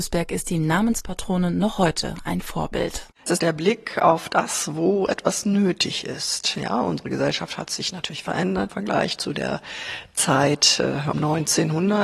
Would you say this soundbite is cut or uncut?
cut